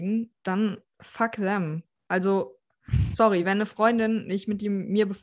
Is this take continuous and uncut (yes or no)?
yes